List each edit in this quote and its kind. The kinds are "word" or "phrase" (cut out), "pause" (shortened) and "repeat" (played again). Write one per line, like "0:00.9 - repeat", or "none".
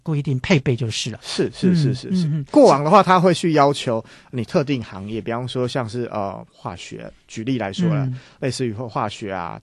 none